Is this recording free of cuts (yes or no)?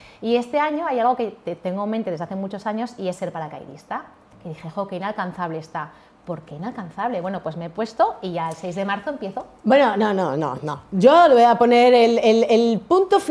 yes